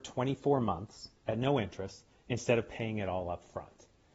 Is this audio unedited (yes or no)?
yes